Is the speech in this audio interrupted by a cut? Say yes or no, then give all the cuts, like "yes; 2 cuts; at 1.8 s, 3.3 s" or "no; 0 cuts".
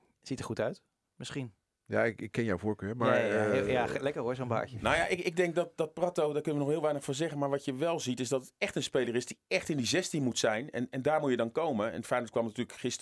yes; 1 cut; at 1.7 s